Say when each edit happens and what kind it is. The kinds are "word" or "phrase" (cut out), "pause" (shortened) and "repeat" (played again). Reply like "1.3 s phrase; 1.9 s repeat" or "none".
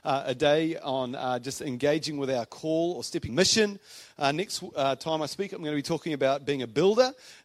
3.3 s phrase